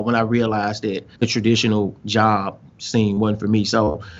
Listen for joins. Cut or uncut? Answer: cut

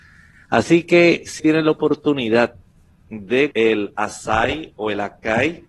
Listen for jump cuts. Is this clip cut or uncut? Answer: cut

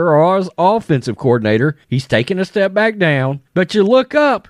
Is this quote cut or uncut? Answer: cut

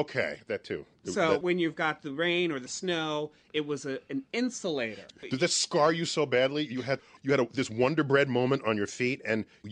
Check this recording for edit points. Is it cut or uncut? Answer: uncut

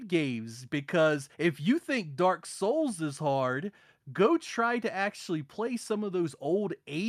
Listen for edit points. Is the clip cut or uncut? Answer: cut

